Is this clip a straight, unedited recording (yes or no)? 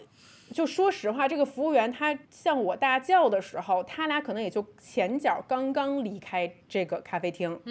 no